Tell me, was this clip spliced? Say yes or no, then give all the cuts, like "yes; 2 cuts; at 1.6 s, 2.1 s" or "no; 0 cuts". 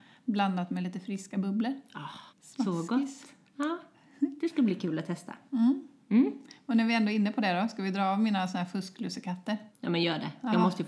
yes; 2 cuts; at 2.3 s, 9.7 s